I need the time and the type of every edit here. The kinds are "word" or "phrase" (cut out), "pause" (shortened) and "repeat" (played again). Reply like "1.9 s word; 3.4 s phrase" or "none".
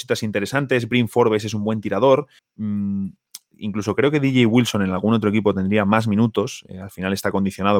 2.4 s pause